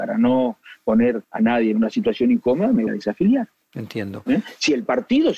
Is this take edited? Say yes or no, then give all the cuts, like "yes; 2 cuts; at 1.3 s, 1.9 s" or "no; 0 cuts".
yes; 2 cuts; at 1.2 s, 2.9 s